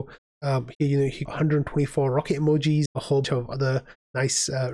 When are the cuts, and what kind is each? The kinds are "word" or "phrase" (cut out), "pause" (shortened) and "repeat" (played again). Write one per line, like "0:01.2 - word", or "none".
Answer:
0:01.3 - word
0:02.9 - word
0:03.2 - word